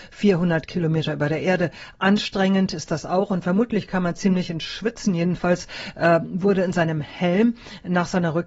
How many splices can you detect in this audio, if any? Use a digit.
0